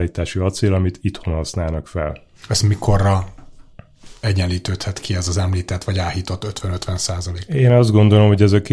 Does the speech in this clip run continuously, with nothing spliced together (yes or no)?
yes